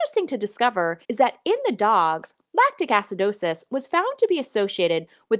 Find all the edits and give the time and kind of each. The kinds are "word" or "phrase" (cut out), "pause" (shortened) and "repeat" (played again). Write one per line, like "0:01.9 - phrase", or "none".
0:01.0 - pause